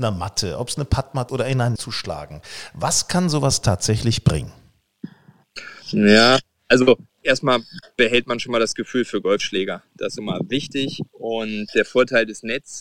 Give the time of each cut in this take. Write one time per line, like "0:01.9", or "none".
0:01.3
0:01.8
0:05.8
0:07.1
0:10.2
0:11.1